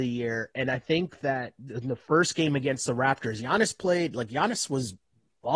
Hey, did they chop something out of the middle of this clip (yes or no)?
no